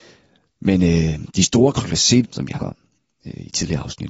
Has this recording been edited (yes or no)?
yes